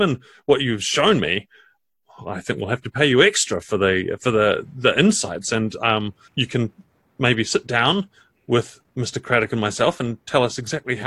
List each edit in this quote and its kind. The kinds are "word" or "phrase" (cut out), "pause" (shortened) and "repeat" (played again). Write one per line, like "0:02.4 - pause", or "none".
0:06.2 - pause